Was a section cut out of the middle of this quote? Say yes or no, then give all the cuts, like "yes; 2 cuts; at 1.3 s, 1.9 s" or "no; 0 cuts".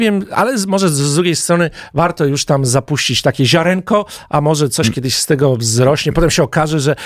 no; 0 cuts